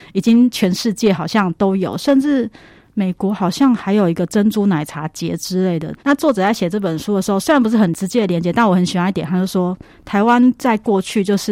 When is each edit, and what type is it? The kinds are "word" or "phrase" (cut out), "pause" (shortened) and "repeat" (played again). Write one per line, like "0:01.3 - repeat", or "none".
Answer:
0:06.0 - pause